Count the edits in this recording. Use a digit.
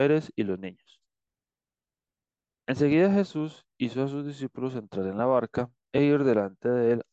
0